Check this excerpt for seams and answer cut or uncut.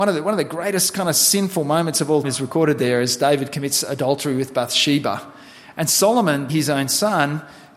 cut